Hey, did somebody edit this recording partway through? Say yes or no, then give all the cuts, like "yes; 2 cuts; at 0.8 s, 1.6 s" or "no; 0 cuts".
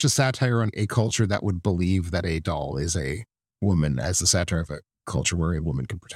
no; 0 cuts